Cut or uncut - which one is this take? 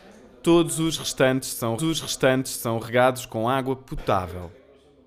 cut